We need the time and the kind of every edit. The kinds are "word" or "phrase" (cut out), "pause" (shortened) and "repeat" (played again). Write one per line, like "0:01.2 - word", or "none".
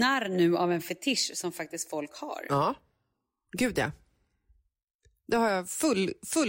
none